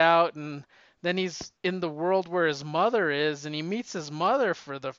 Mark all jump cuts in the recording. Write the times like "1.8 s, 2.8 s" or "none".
1.6 s